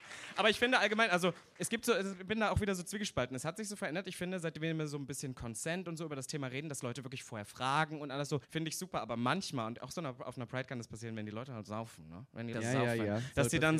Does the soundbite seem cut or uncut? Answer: cut